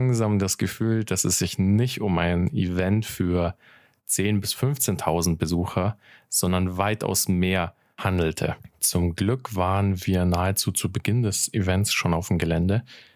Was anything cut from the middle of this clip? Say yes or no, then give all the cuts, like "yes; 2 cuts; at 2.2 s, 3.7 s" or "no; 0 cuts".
no; 0 cuts